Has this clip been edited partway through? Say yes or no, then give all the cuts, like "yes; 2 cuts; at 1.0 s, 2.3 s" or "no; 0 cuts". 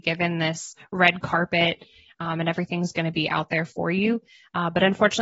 no; 0 cuts